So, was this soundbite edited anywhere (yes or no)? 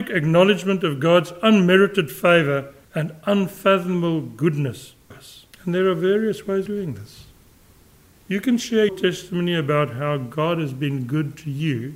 yes